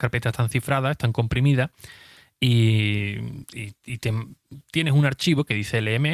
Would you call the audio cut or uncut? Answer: uncut